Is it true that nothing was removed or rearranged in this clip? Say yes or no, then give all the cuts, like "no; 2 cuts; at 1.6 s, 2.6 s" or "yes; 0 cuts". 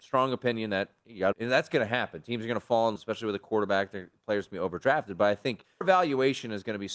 no; 3 cuts; at 1.3 s, 3.0 s, 5.8 s